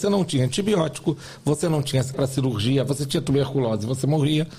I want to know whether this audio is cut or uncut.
cut